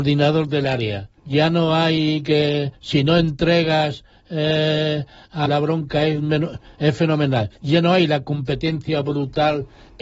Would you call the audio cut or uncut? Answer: cut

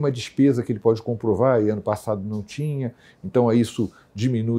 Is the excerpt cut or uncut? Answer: uncut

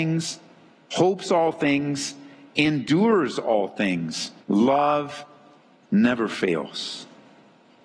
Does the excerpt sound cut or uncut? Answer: cut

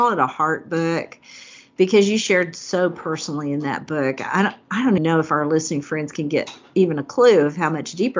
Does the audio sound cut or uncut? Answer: cut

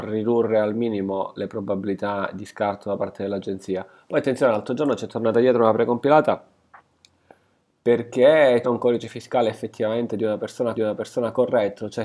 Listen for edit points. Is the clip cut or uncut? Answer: cut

